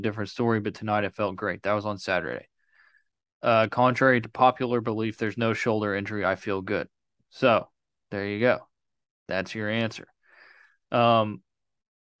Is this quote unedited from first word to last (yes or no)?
yes